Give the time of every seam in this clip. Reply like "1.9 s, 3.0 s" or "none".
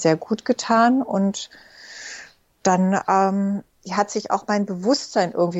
none